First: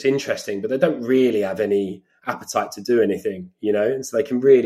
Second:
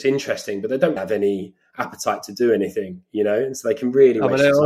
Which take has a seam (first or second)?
second